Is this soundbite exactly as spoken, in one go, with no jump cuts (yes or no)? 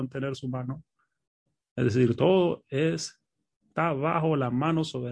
yes